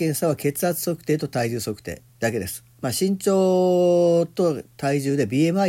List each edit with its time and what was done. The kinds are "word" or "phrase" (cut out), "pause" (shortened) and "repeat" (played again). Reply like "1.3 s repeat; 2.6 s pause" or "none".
2.1 s pause

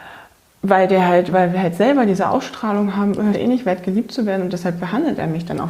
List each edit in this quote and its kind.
1.3 s word; 3.3 s phrase

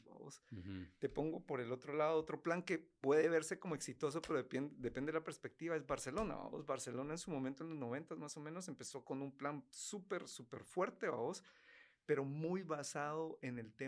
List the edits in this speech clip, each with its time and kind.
none

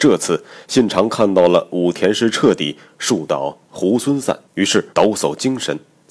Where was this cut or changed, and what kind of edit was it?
4.5 s pause; 4.9 s pause

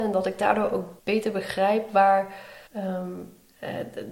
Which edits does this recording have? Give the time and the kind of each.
1.0 s pause; 2.7 s pause

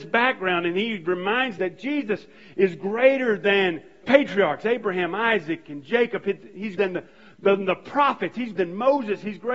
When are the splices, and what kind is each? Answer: 1.6 s word; 4.0 s word; 6.8 s word; 8.6 s word

